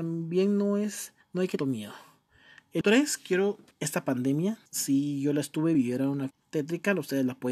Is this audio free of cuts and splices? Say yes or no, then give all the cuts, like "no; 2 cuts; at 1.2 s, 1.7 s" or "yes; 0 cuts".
no; 7 cuts; at 1.2 s, 1.6 s, 2.8 s, 3.7 s, 4.7 s, 5.7 s, 6.3 s